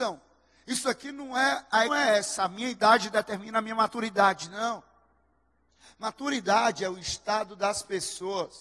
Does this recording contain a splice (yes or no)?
yes